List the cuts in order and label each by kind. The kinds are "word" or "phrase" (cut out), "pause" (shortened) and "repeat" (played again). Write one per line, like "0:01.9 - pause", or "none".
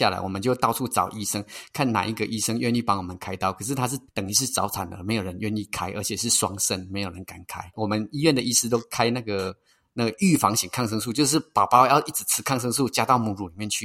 0:04.1 - pause